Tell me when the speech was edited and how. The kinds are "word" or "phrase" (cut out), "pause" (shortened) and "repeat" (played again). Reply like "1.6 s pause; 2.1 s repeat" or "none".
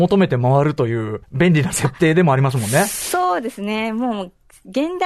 1.2 s pause